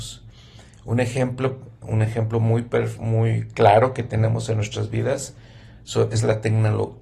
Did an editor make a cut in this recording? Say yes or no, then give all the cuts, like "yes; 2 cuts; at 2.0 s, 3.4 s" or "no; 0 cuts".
no; 0 cuts